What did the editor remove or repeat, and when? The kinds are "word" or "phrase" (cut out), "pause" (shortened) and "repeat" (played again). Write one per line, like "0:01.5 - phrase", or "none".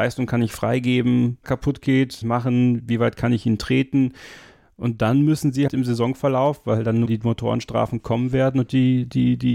0:01.4 - phrase
0:02.2 - phrase
0:05.7 - word
0:07.1 - word